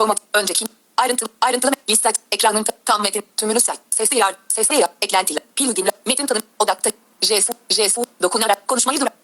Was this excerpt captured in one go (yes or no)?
yes